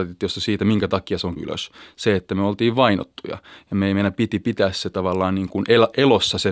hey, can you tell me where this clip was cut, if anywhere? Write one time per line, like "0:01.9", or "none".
0:01.4